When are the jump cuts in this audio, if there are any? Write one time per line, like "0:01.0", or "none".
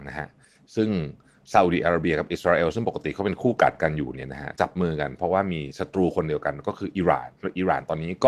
none